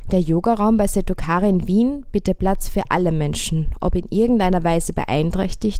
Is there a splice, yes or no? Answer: no